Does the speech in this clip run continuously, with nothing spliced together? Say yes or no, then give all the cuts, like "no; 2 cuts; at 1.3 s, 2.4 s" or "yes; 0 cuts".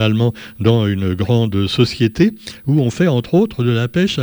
yes; 0 cuts